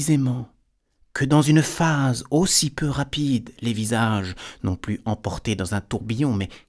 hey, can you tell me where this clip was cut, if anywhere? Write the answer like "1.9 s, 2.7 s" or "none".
none